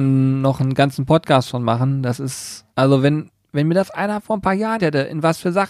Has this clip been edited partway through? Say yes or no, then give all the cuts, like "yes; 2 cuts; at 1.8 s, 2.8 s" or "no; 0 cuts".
yes; 2 cuts; at 2.7 s, 4.8 s